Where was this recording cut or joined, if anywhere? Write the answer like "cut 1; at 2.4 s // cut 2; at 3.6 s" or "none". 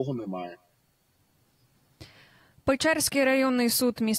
none